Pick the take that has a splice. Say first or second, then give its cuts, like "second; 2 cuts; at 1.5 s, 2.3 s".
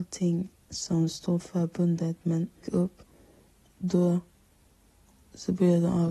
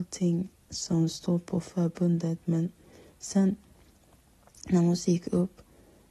first; 2 cuts; at 1.4 s, 2.6 s